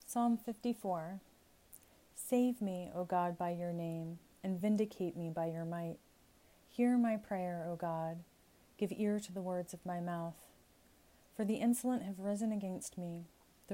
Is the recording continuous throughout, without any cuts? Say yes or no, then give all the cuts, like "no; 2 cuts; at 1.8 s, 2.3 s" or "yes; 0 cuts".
yes; 0 cuts